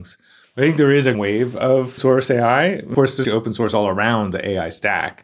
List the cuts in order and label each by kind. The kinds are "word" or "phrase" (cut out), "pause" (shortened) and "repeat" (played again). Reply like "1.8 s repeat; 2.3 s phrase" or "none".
1.1 s word; 2.0 s word; 2.9 s word; 3.2 s word

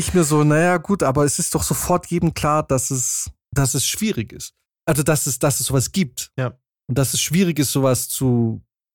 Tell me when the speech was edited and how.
none

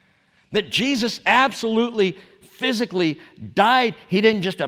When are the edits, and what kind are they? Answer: none

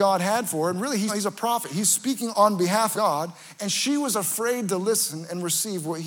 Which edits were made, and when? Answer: 1.1 s word; 2.3 s word; 2.9 s word

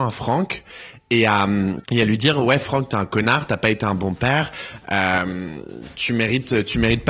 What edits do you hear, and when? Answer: 1.8 s pause

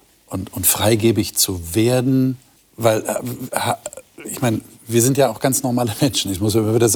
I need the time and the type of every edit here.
2.6 s pause

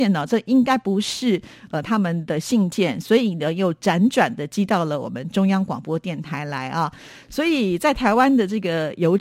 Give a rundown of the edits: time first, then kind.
none

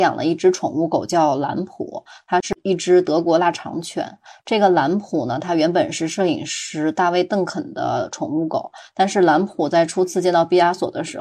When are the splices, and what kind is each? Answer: none

